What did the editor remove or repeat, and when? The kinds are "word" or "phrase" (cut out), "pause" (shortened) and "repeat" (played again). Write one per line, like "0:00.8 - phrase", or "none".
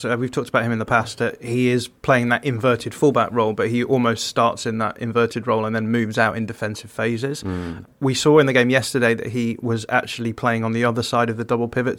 0:02.0 - pause

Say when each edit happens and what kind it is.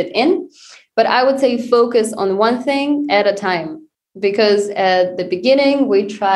none

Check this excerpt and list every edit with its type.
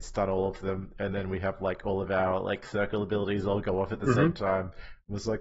none

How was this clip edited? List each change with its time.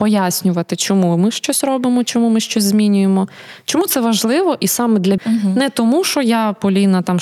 0:05.2 - word

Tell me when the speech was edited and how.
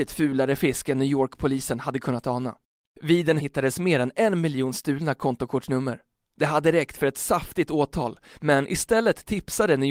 0:02.7 - pause
0:03.4 - phrase
0:06.1 - pause

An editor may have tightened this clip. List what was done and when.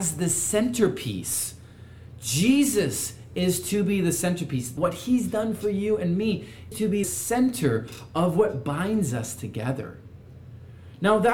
0:04.8 - phrase
0:06.7 - word
0:07.0 - word

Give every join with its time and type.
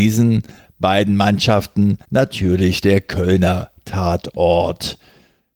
0:02.0 - pause

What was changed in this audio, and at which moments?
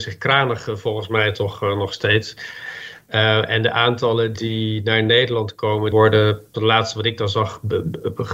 0:04.3 - word
0:05.9 - word
0:06.5 - word

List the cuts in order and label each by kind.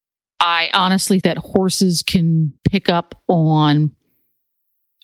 0:01.2 - word
0:02.6 - pause

